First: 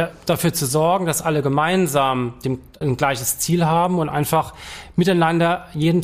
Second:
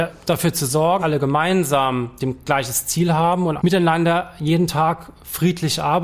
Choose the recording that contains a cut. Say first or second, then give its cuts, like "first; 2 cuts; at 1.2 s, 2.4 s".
second; 3 cuts; at 1.0 s, 2.5 s, 3.6 s